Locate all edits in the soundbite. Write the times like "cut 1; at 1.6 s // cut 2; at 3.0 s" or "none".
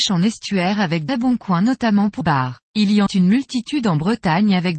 cut 1; at 1.1 s // cut 2; at 2.2 s // cut 3; at 2.6 s // cut 4; at 3.1 s